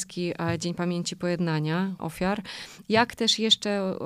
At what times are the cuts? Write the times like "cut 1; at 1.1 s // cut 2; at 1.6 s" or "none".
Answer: cut 1; at 2.0 s